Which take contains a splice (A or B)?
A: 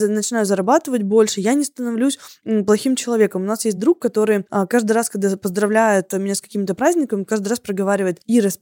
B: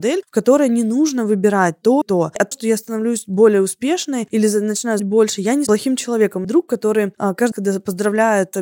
B